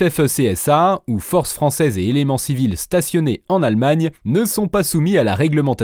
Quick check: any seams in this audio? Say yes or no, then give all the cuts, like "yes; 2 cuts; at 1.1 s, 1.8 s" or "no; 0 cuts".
yes; 1 cut; at 4.2 s